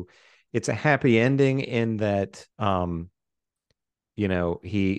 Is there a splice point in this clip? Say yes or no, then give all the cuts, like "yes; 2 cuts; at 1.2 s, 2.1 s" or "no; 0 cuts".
yes; 1 cut; at 2.5 s